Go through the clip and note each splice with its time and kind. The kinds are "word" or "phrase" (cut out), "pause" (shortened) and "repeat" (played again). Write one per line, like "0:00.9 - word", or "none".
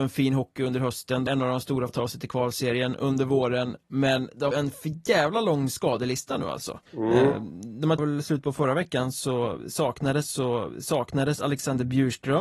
0:01.3 - word
0:01.9 - word
0:04.5 - phrase
0:06.9 - pause
0:08.0 - phrase
0:10.2 - repeat